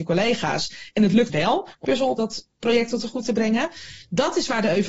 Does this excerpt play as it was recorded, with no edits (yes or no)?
no